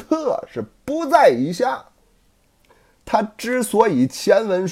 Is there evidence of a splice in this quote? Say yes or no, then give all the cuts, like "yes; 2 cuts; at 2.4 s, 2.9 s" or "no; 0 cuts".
no; 0 cuts